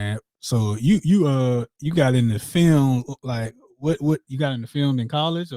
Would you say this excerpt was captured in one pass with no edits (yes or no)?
yes